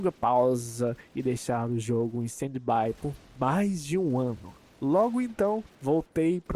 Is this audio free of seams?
yes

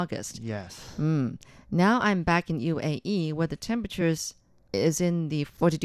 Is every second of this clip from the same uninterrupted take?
yes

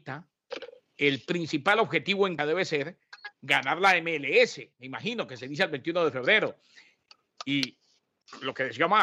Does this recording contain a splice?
yes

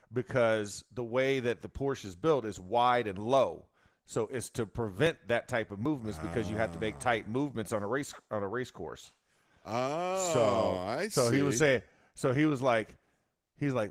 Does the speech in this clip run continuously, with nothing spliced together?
yes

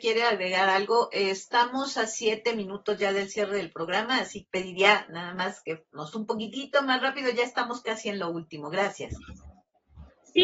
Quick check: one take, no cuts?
no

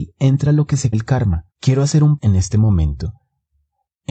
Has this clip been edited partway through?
yes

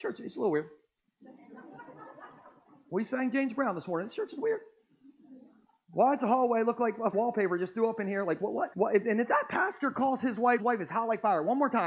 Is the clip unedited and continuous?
no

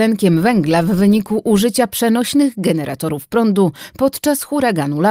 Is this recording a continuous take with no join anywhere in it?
yes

